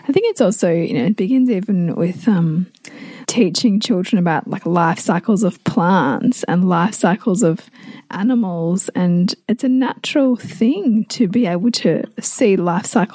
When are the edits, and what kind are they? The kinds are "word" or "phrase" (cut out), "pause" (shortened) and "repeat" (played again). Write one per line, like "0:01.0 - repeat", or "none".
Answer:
0:03.2 - word